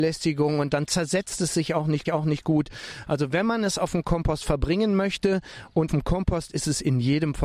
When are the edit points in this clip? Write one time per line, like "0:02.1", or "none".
0:02.1
0:05.9